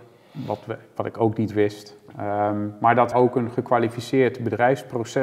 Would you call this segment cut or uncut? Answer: cut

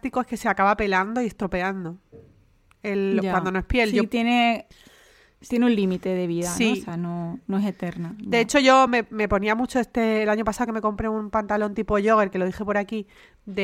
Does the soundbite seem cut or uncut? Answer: uncut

